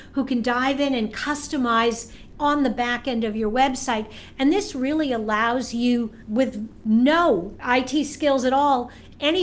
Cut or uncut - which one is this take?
uncut